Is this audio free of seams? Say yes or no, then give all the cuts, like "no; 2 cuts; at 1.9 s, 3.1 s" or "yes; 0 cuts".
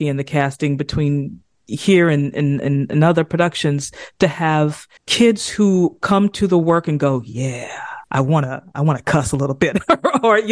no; 2 cuts; at 5.0 s, 8.0 s